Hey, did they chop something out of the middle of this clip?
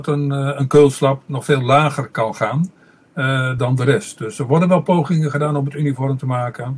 yes; 1 cut; at 3.6 s

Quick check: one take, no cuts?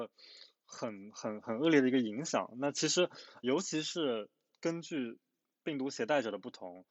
no; 1 cut; at 3.4 s

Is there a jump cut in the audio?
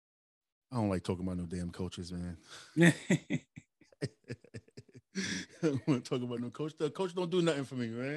no; 0 cuts

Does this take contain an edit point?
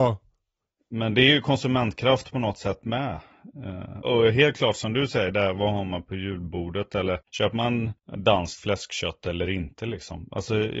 yes; 1 cut; at 4.0 s

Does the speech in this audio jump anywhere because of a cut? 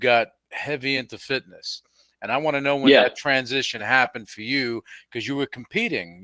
no; 0 cuts

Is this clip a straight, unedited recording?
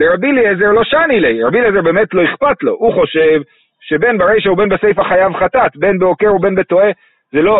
yes; 0 cuts

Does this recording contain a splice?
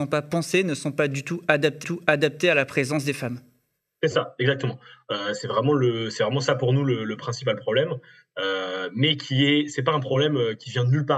yes; 1 cut; at 1.8 s

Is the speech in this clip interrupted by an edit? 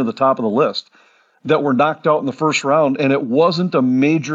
no; 0 cuts

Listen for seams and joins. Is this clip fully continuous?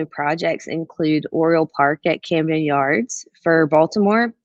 yes; 0 cuts

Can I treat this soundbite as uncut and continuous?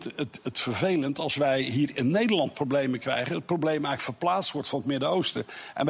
yes; 0 cuts

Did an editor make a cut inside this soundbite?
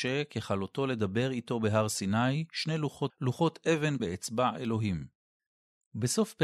yes; 2 cuts; at 3.1 s, 4.0 s

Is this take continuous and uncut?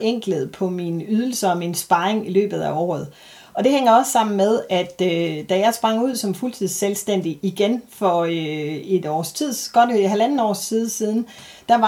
yes; 0 cuts

